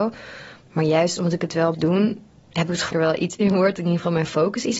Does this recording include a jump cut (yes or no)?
yes